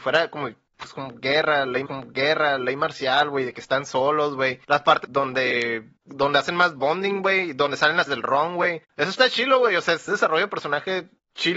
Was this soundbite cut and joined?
yes; 7 cuts; at 1.9 s, 4.6 s, 5.0 s, 6.0 s, 8.1 s, 8.8 s, 10.1 s

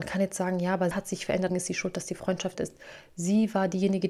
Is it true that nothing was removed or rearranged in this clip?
no; 3 cuts; at 0.9 s, 1.5 s, 2.5 s

